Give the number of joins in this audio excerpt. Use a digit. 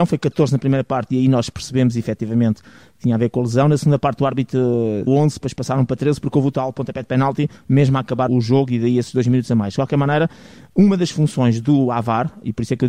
2